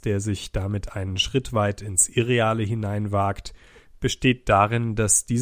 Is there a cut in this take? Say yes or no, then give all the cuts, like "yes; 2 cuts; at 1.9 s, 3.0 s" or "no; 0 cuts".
no; 0 cuts